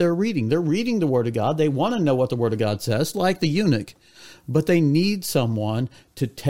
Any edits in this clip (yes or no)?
yes